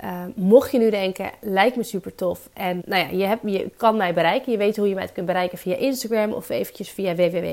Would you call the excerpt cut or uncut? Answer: cut